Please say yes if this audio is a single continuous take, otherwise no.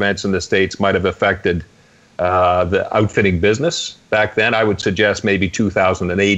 no